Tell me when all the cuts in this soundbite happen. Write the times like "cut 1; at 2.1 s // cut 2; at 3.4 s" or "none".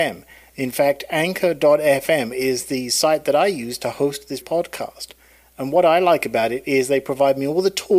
cut 1; at 4.4 s